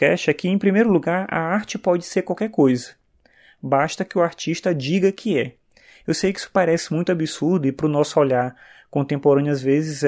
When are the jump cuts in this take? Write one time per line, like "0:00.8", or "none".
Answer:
none